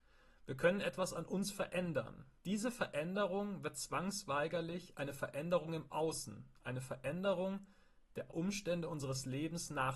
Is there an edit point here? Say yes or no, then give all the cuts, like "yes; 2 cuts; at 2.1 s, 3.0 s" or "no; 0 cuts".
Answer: yes; 2 cuts; at 2.4 s, 8.3 s